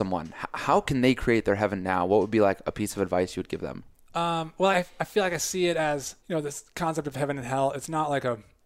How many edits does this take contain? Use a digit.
3